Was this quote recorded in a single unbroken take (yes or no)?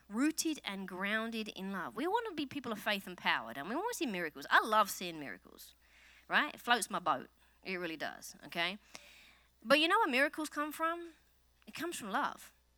yes